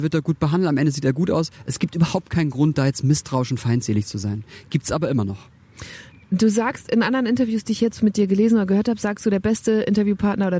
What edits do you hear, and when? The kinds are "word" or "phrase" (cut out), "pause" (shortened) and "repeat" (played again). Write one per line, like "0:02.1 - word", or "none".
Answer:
none